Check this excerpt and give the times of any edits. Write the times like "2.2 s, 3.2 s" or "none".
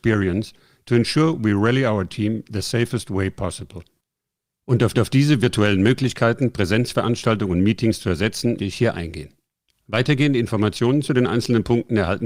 4.9 s, 8.6 s